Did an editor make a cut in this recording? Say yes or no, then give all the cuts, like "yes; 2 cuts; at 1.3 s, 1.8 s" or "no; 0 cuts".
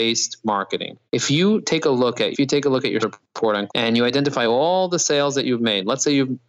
yes; 4 cuts; at 1.1 s, 2.3 s, 3.0 s, 3.7 s